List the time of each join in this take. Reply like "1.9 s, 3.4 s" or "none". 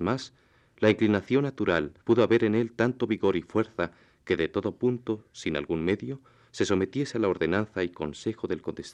2.0 s